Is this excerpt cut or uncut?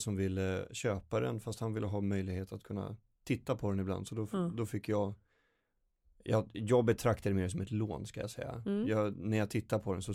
uncut